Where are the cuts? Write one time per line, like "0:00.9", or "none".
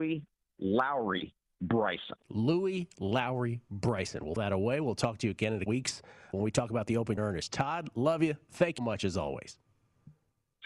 0:02.2
0:04.4
0:05.7
0:06.3
0:07.2
0:08.8